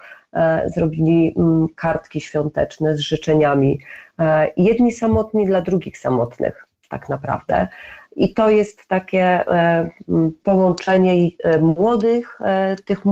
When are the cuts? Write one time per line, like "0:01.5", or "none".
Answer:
none